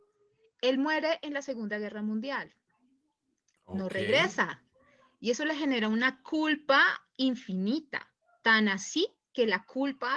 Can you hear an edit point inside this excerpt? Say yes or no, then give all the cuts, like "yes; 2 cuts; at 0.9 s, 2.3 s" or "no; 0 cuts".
no; 0 cuts